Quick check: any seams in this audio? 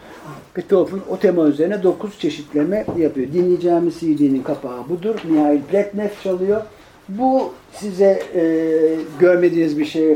yes; 1 cut; at 6.8 s

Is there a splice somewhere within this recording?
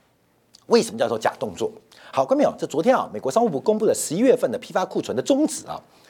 no; 0 cuts

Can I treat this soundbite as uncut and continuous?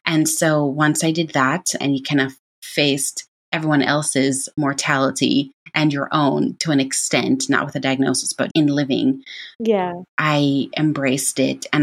no; 4 cuts; at 1.8 s, 8.5 s, 9.6 s, 10.1 s

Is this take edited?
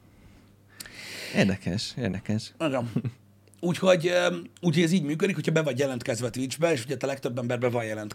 yes; 1 cut; at 4.6 s

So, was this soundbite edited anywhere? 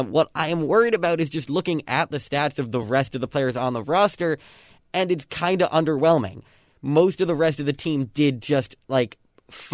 no; 0 cuts

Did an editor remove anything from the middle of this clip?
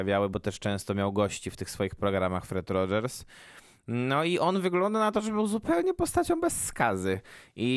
no; 0 cuts

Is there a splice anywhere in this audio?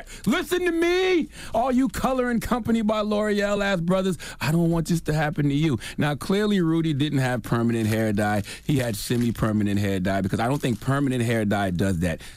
no; 0 cuts

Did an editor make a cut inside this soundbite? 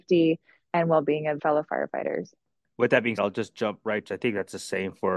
yes; 3 cuts; at 1.4 s, 3.2 s, 4.1 s

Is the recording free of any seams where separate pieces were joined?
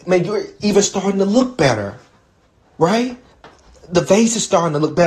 yes; 0 cuts

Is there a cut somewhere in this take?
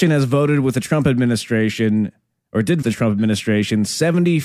yes; 1 cut; at 2.8 s

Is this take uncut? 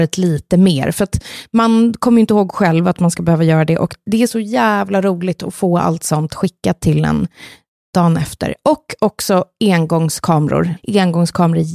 yes; 0 cuts

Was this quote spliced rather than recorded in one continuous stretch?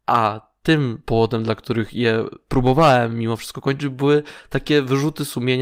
no; 0 cuts

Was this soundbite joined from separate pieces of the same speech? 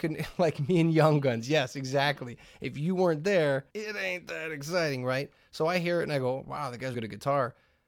yes; 2 cuts; at 3.7 s, 6.9 s

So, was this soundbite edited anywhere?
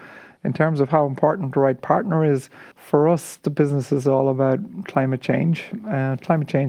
yes; 1 cut; at 2.7 s

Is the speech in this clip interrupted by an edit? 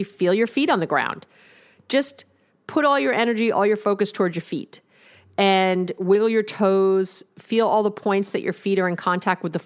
no; 0 cuts

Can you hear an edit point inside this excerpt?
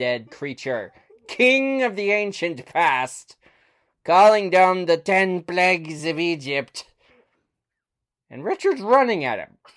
no; 0 cuts

